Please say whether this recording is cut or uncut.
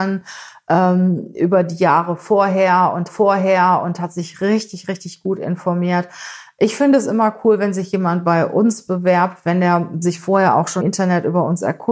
cut